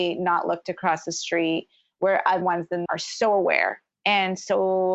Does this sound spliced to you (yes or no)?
yes